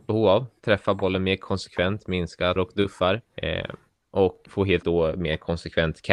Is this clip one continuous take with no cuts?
no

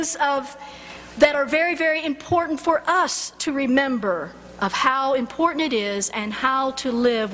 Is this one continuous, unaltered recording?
yes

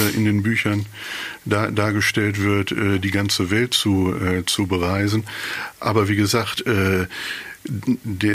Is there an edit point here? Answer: no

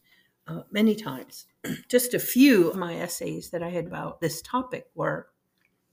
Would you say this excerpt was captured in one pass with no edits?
no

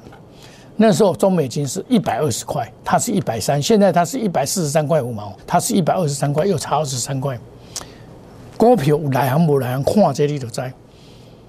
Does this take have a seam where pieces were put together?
yes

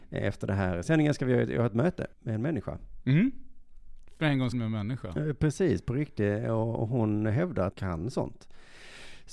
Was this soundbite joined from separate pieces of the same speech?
yes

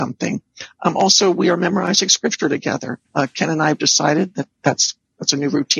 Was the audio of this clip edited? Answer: yes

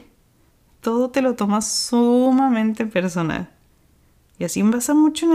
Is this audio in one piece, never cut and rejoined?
yes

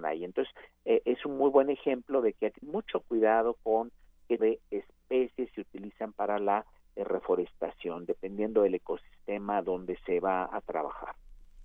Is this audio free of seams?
no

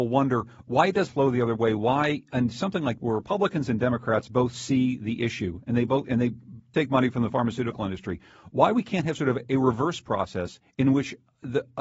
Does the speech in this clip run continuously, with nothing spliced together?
no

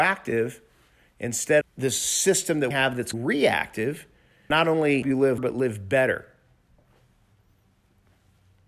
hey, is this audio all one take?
no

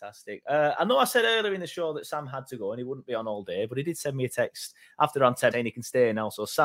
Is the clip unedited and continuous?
no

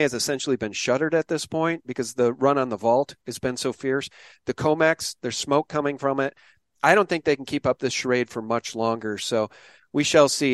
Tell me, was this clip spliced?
no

